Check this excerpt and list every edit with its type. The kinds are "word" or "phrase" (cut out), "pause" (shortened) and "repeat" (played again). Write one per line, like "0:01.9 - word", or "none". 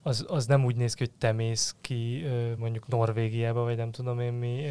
none